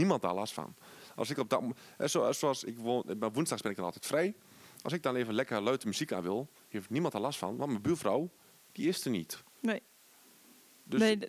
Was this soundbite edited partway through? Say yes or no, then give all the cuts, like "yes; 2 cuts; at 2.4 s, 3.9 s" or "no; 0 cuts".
no; 0 cuts